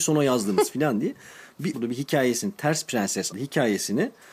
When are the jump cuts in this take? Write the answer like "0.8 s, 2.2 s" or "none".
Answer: 1.7 s, 3.3 s

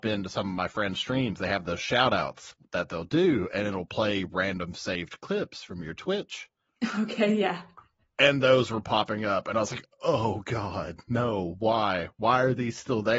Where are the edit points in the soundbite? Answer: none

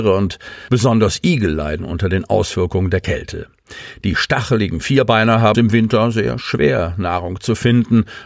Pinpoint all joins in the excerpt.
5.5 s

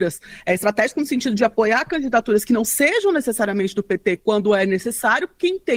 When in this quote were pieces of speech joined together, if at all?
none

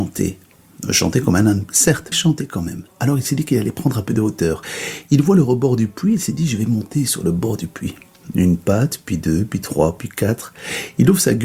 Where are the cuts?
2.1 s

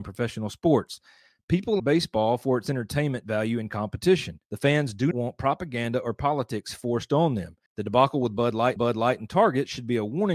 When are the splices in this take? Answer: 1.8 s, 4.4 s, 5.1 s, 7.7 s, 8.8 s

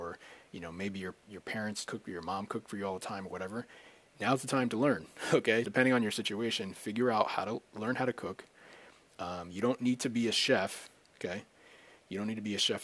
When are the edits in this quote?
1.9 s, 5.6 s

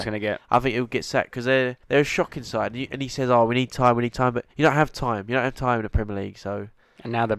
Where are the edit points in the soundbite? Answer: 1.8 s, 4.5 s

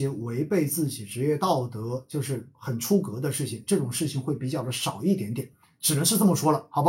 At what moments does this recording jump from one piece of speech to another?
none

